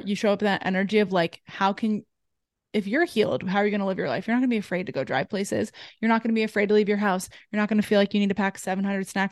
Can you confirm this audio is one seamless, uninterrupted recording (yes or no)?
yes